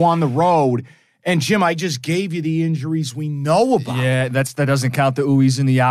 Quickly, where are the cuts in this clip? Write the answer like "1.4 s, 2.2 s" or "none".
none